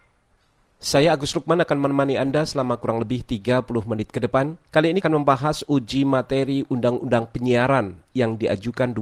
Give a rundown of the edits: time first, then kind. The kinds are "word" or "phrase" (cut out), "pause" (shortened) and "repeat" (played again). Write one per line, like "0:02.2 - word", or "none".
0:04.6 - pause
0:05.0 - word